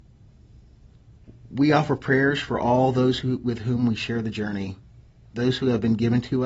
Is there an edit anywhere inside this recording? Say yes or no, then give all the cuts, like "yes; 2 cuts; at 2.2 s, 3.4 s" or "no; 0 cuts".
no; 0 cuts